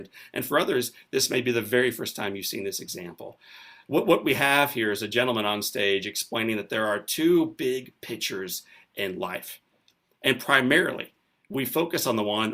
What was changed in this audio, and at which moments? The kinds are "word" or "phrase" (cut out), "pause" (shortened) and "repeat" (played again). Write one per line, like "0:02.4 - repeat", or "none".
none